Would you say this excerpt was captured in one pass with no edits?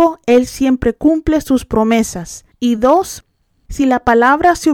yes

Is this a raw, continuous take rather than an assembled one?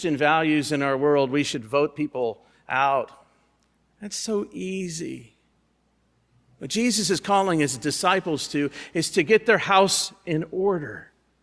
yes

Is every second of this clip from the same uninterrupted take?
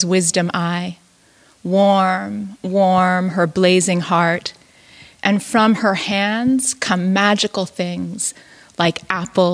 yes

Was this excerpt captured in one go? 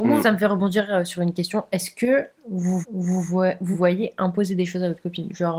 no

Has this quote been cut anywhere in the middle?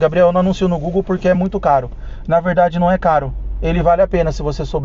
no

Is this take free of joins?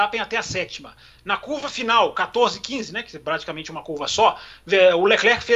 yes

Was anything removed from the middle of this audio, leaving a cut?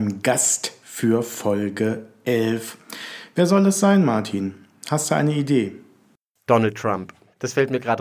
no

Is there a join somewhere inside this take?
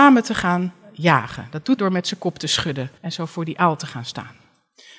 yes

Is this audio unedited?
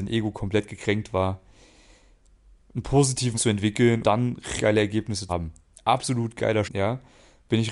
no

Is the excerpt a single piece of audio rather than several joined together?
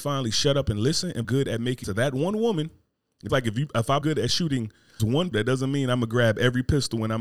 no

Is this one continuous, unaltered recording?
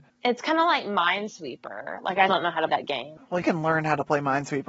no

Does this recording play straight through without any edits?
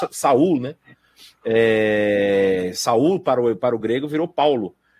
yes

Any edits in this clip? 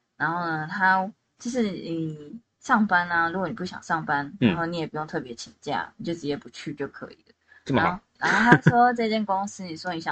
yes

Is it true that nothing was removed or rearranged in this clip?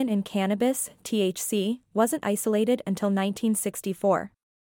yes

